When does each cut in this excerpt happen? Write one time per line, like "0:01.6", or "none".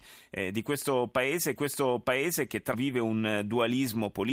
0:01.6
0:02.7